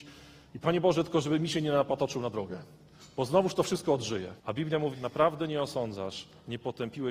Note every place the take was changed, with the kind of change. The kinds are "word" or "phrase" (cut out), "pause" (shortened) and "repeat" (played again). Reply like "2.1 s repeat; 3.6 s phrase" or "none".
4.4 s pause; 4.9 s word